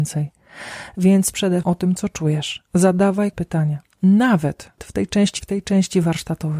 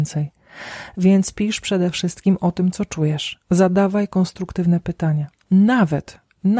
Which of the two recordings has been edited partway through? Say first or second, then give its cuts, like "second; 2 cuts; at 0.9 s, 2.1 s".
first; 5 cuts; at 1.3 s, 1.6 s, 3.3 s, 4.8 s, 5.4 s